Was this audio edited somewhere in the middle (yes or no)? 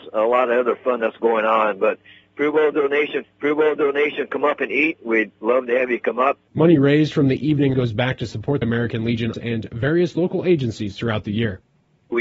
yes